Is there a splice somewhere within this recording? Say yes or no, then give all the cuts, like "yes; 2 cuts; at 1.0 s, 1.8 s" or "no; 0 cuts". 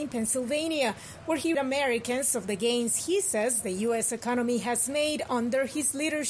yes; 1 cut; at 1.5 s